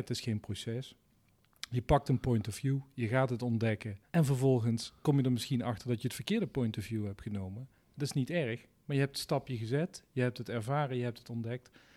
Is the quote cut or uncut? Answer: cut